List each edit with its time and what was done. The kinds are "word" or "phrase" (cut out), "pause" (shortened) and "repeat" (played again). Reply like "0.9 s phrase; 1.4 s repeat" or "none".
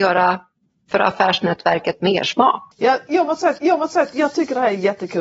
3.6 s repeat